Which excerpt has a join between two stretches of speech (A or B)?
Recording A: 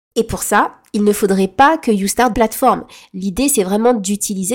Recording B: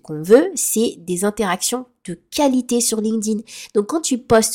A